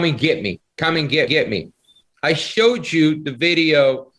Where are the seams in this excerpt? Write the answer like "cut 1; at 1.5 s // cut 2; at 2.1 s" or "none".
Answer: cut 1; at 1.3 s